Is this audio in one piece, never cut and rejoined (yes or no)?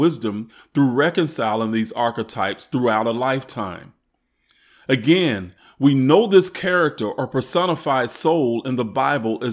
yes